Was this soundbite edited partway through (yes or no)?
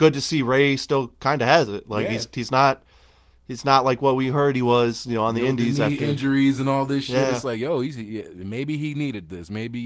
no